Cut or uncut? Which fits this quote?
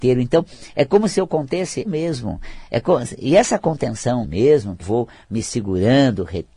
cut